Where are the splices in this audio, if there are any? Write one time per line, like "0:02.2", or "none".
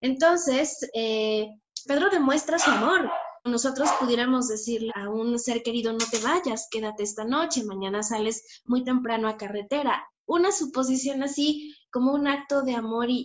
0:01.9
0:03.5
0:04.9